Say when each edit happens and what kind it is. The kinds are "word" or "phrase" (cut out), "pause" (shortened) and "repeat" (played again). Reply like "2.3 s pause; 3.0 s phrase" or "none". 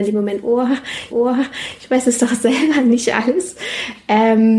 1.1 s repeat